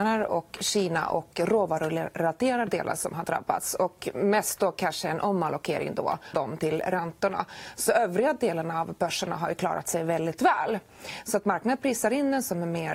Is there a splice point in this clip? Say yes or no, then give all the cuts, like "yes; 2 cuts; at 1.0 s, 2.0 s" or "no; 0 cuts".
yes; 2 cuts; at 2.7 s, 6.3 s